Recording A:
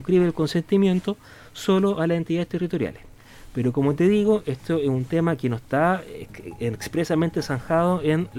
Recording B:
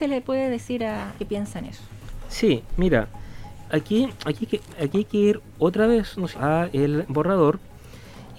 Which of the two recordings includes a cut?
B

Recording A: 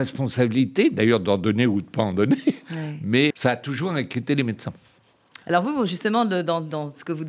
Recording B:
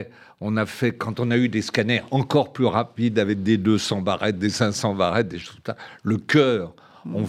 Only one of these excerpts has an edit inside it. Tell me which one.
A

